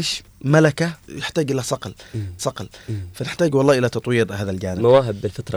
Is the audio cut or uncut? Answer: cut